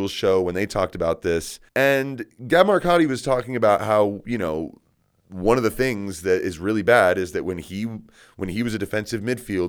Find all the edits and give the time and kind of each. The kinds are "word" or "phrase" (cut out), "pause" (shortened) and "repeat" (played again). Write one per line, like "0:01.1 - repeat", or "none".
0:01.7 - pause